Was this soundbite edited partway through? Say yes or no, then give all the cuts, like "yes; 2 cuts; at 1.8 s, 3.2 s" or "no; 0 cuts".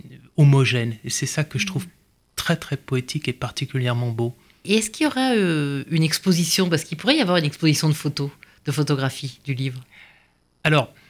no; 0 cuts